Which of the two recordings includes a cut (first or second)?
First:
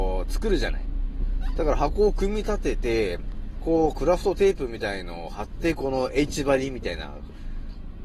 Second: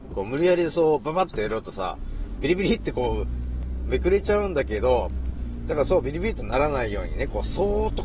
second